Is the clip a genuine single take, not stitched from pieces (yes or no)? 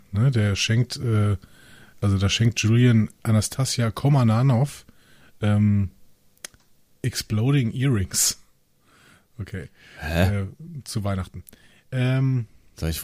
yes